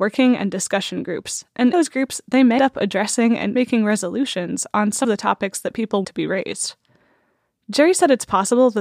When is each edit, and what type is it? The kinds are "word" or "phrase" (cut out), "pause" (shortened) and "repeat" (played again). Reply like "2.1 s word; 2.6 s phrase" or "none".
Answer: 1.7 s word; 2.6 s word; 3.5 s word; 5.0 s word; 6.0 s word